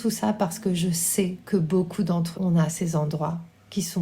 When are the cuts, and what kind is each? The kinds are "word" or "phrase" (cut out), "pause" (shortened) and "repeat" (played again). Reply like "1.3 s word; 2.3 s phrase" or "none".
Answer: 1.4 s pause; 2.3 s word